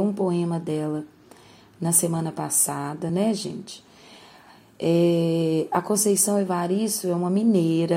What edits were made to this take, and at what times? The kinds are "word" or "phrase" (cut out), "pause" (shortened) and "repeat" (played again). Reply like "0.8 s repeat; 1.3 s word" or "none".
none